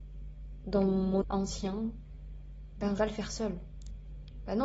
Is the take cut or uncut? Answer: cut